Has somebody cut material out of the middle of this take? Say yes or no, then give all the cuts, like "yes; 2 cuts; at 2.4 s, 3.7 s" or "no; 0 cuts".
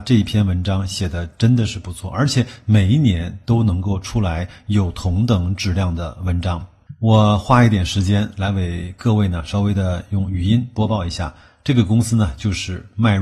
no; 0 cuts